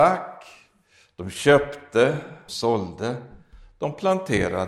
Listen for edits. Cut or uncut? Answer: cut